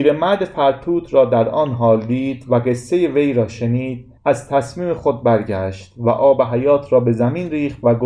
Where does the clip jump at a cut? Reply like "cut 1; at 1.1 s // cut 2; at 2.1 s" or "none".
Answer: cut 1; at 4.2 s